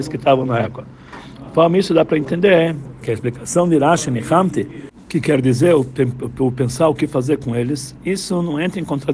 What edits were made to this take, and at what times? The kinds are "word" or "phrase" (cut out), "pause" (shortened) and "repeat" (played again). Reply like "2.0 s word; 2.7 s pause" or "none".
none